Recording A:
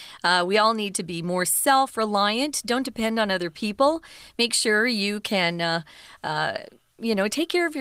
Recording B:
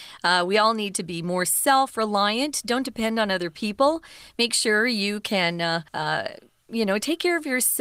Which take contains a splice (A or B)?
B